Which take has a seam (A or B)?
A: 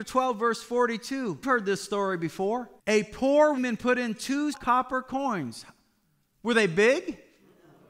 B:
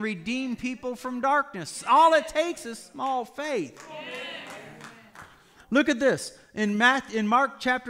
A